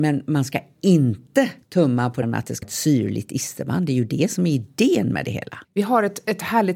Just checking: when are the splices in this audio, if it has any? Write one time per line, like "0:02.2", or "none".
0:01.6
0:02.2
0:02.6
0:05.6